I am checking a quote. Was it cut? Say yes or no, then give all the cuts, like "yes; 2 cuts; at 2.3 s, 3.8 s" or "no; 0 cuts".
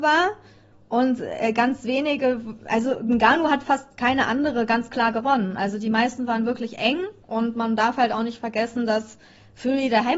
yes; 1 cut; at 7.2 s